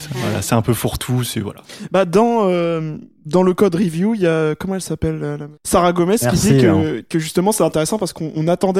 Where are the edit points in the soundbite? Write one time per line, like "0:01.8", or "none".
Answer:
0:05.6